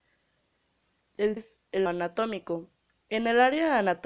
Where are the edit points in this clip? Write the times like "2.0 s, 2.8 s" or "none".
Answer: 1.4 s, 1.9 s